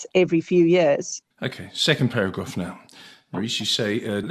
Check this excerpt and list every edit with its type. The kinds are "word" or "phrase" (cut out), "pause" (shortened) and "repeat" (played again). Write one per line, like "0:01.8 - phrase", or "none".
0:01.3 - pause